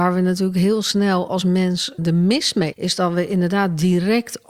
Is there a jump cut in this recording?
yes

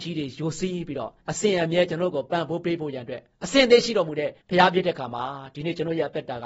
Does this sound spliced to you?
yes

